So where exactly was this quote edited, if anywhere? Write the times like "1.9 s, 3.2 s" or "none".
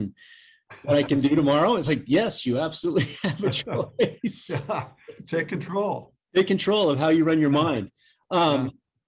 none